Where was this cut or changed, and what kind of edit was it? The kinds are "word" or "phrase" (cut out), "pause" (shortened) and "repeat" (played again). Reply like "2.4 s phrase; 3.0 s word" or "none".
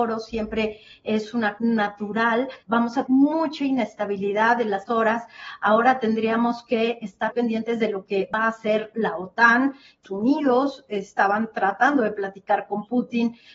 1.6 s word; 2.6 s pause; 3.0 s word; 4.9 s word; 7.3 s word; 8.9 s word; 10.0 s phrase